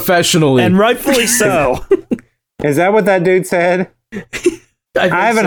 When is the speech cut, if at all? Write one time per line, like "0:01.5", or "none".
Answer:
none